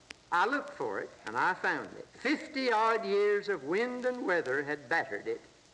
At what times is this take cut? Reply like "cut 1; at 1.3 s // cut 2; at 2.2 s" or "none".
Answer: cut 1; at 1.2 s // cut 2; at 2.1 s